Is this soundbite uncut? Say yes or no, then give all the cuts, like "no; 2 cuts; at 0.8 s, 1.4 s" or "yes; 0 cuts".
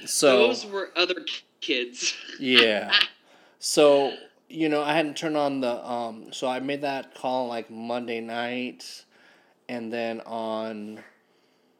yes; 0 cuts